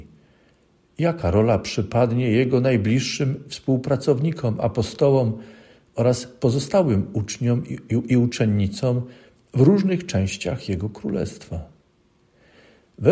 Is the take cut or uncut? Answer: uncut